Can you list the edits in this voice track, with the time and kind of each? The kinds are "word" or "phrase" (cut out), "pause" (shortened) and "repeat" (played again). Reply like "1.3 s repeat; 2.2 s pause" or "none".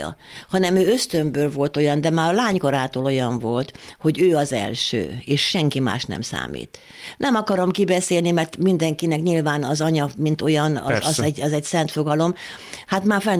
none